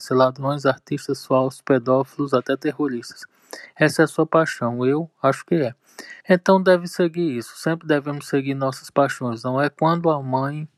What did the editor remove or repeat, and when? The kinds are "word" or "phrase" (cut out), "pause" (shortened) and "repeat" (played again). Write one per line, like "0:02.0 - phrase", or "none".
0:06.2 - pause